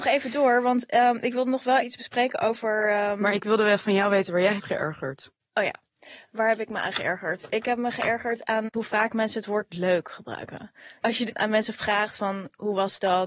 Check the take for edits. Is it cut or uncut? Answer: cut